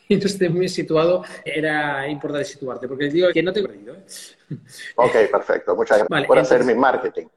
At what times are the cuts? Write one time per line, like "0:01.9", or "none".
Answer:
0:01.5
0:03.3
0:03.6
0:06.0